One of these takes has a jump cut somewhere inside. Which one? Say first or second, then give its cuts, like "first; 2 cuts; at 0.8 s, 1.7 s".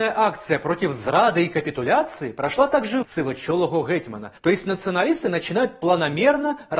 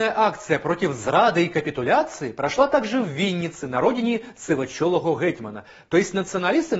first; 2 cuts; at 3.0 s, 4.4 s